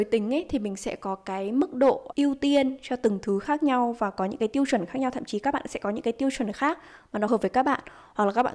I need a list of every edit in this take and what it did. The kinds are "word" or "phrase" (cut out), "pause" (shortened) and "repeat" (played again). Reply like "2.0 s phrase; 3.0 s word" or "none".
2.1 s word; 7.3 s word